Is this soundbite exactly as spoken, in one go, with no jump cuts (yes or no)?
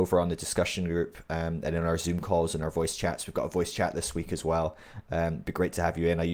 yes